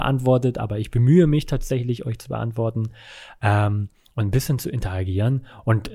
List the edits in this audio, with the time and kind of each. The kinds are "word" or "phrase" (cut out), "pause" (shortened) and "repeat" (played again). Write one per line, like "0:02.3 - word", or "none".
none